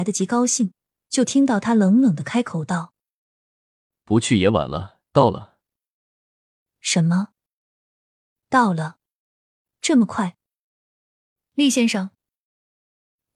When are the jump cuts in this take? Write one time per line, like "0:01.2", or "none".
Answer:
0:05.1

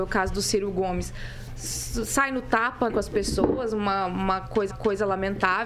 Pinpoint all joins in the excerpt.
0:02.9
0:04.7

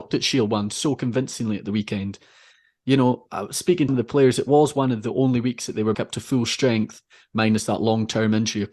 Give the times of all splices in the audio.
0:03.9
0:05.9

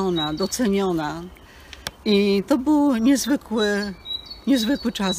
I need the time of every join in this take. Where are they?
0:02.0

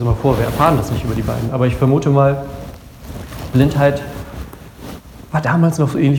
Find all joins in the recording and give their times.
none

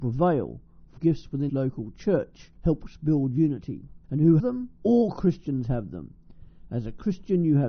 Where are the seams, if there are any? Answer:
0:01.0
0:01.5
0:02.6
0:04.0
0:04.4
0:04.8

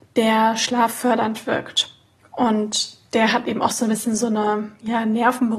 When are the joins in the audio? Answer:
0:02.2

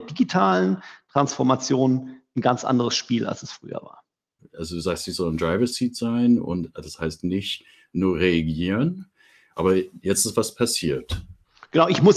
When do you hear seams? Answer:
none

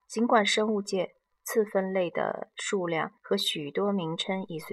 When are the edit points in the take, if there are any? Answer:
0:03.2

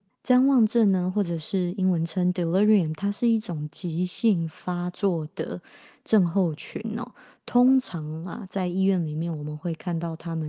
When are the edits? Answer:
none

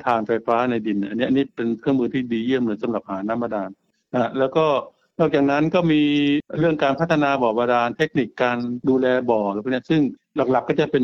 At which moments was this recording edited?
none

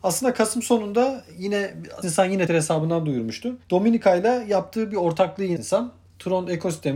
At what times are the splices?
0:02.0
0:02.5
0:03.6
0:05.6

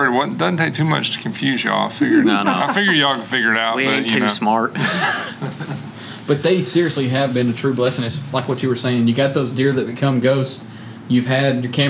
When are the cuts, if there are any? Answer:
none

